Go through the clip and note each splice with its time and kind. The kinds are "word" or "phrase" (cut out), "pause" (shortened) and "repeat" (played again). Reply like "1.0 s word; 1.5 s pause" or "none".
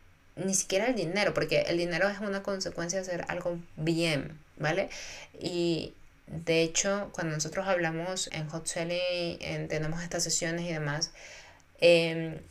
8.3 s word